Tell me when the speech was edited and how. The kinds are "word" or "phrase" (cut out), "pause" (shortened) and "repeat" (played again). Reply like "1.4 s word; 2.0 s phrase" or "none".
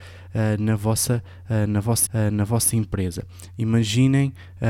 2.1 s repeat